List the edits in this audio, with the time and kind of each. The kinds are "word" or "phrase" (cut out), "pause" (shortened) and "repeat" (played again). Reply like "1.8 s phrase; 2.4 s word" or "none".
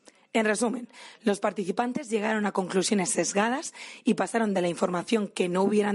none